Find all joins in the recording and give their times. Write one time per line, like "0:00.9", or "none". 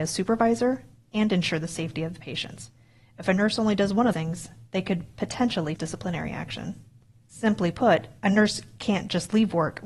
0:04.1
0:05.8